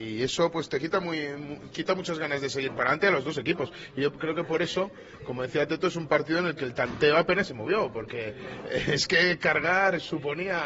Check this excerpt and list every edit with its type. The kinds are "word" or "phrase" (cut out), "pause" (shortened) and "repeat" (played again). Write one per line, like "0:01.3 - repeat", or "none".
none